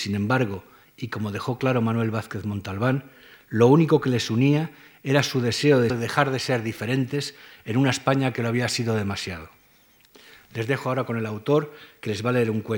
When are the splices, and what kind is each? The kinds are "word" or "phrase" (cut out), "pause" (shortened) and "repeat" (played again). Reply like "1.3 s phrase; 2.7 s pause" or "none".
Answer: 5.9 s phrase